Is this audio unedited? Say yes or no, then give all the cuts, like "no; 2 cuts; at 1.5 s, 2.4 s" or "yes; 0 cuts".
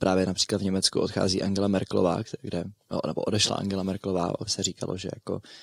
no; 1 cut; at 4.5 s